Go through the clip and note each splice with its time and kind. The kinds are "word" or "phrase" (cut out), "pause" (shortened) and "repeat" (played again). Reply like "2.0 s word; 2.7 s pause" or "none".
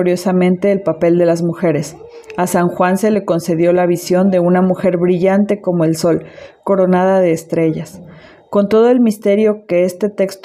none